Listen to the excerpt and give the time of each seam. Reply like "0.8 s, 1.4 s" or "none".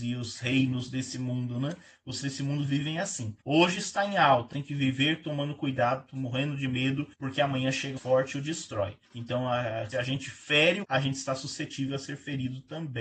2.2 s, 3.4 s, 4.5 s, 7.1 s, 8.0 s, 9.0 s, 9.9 s, 10.8 s